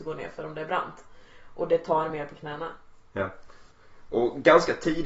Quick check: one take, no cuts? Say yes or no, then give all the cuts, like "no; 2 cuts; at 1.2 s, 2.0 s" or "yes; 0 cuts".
yes; 0 cuts